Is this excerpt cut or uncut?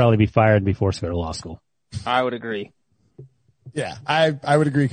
uncut